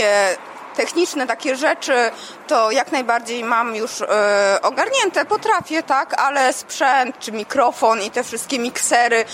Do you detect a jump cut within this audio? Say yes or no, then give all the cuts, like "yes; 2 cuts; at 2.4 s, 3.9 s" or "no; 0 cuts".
no; 0 cuts